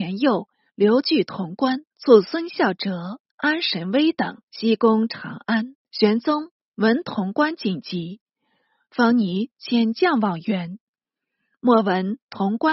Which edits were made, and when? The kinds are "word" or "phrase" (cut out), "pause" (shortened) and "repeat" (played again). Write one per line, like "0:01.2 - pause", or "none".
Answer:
0:01.9 - pause
0:03.3 - pause
0:04.5 - pause
0:05.8 - pause